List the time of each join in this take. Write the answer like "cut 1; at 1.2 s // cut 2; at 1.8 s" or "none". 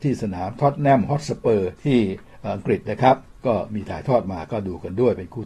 cut 1; at 1.8 s